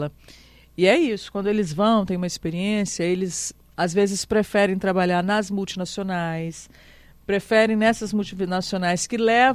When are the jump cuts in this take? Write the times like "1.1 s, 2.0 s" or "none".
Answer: none

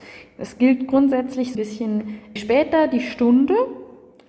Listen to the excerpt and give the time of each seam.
1.5 s, 2.4 s

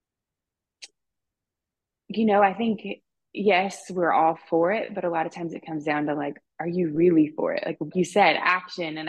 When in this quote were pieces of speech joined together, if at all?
7.9 s

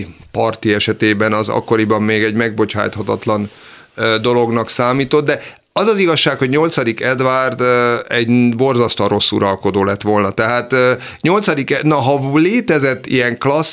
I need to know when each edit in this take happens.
none

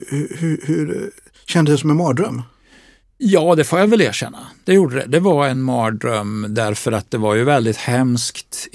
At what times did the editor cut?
none

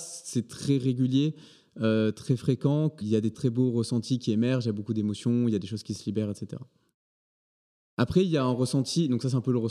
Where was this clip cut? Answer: 3.0 s, 3.3 s

